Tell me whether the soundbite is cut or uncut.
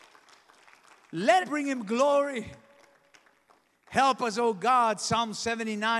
cut